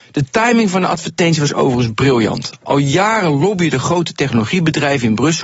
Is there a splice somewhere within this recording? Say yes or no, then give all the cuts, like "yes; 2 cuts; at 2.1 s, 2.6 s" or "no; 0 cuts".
no; 0 cuts